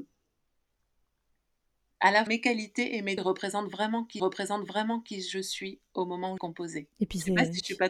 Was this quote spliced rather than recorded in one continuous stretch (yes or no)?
yes